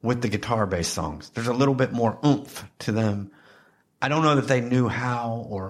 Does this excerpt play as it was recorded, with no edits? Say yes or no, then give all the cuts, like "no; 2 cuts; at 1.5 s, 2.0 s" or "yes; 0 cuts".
yes; 0 cuts